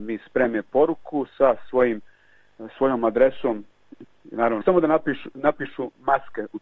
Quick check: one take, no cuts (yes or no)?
no